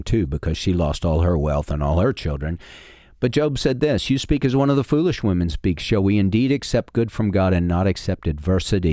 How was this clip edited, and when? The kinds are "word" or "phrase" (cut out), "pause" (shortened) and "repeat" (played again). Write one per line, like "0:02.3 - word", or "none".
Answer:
none